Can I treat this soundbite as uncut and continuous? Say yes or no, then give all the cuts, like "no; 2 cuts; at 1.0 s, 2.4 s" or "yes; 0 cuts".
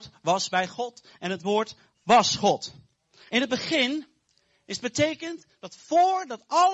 yes; 0 cuts